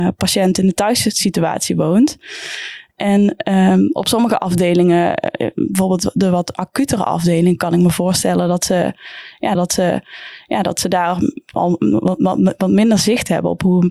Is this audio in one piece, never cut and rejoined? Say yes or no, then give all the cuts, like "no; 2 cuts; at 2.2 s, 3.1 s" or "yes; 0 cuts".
no; 1 cut; at 9.6 s